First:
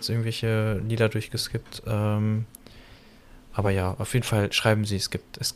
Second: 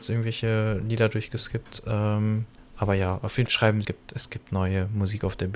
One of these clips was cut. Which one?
second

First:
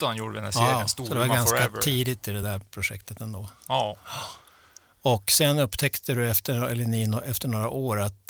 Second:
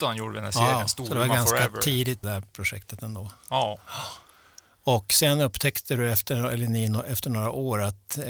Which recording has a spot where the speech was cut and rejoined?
second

